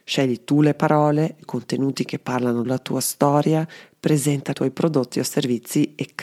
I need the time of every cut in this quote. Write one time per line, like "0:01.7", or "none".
0:01.4
0:02.6
0:04.5